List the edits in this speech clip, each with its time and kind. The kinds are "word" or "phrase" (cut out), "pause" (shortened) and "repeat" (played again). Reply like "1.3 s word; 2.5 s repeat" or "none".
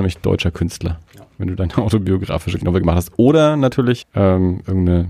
1.1 s pause; 2.6 s word; 4.0 s word

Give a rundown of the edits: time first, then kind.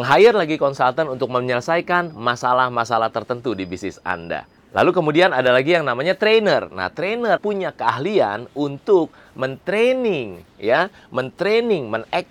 7.4 s word

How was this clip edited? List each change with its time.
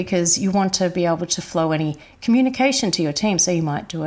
none

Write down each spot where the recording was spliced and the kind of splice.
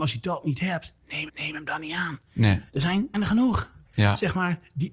1.3 s repeat; 2.7 s pause; 3.1 s word

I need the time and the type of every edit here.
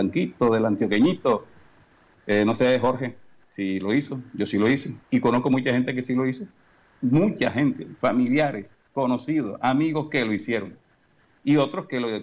5.0 s pause

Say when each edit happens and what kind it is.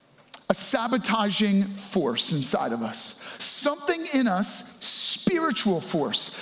none

